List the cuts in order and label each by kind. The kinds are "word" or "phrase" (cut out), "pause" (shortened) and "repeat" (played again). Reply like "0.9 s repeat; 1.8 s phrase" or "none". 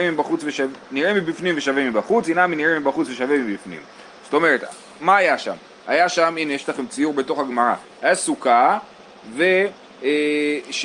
none